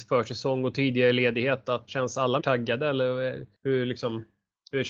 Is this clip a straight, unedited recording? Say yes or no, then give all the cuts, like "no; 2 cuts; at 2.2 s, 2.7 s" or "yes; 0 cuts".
no; 3 cuts; at 1.9 s, 2.4 s, 3.5 s